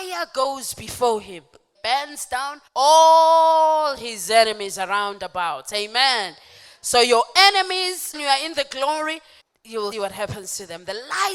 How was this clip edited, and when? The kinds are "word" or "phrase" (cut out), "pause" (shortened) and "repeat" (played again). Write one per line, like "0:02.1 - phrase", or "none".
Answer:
0:01.7 - word
0:02.7 - pause
0:08.1 - word
0:09.4 - pause
0:09.9 - word